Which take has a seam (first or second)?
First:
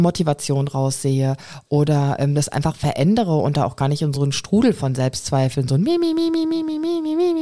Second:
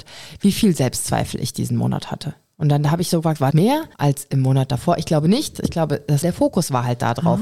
second